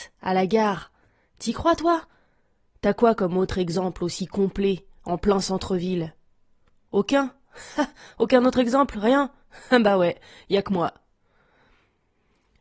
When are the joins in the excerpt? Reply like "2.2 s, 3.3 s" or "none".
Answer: none